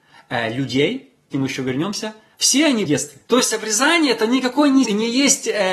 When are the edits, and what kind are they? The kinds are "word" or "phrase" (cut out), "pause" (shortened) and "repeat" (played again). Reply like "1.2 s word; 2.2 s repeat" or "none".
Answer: 1.3 s phrase; 2.3 s pause; 2.9 s phrase; 3.2 s pause; 4.8 s word